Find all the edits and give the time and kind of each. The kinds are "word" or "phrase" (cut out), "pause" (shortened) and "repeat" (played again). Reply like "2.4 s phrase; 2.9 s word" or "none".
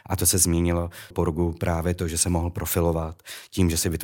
1.1 s phrase